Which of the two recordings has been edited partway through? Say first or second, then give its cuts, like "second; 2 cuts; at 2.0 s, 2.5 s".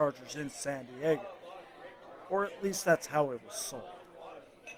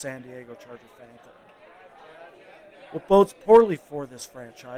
second; 1 cut; at 1.2 s